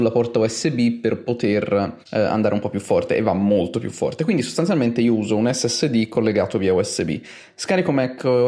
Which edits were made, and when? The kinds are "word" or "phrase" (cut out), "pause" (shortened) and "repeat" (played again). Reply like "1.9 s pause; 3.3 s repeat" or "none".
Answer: 2.0 s pause